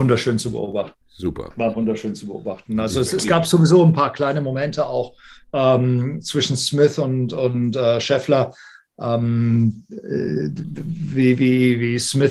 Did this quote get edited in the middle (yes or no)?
no